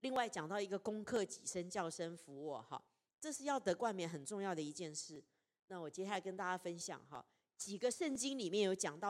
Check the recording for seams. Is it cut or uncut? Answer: uncut